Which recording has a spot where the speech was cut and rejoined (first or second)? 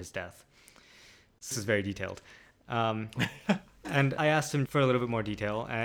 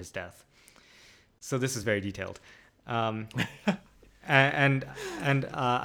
first